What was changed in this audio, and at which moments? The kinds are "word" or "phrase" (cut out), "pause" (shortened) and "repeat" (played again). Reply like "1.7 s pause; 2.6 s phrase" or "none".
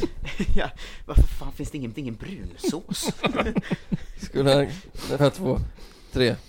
1.9 s repeat; 5.2 s word